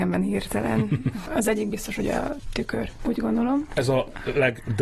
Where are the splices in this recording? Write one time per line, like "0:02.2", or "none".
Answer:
none